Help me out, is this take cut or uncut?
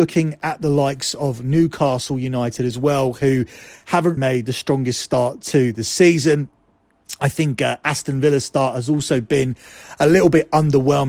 cut